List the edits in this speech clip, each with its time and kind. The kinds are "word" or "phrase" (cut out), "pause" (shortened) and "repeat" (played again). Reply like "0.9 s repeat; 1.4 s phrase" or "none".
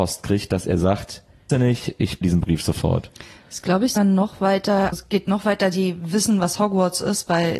1.5 s word; 2.2 s word; 4.0 s word; 4.9 s word